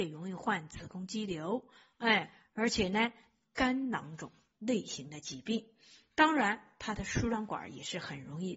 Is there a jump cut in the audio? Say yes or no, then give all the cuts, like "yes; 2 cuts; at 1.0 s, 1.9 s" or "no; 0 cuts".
yes; 1 cut; at 3.4 s